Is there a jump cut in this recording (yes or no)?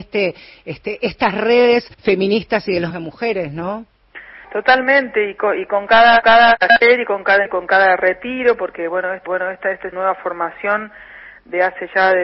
yes